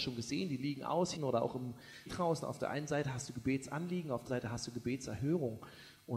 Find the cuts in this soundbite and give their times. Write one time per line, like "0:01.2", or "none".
0:01.2
0:02.1
0:04.3